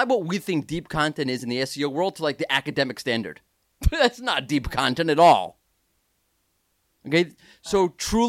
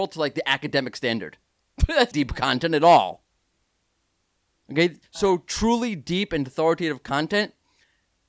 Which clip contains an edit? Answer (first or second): second